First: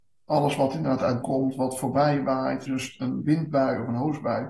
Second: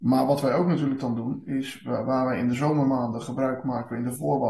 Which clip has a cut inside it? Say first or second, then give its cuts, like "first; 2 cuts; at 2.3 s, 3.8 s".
first; 2 cuts; at 1.2 s, 2.7 s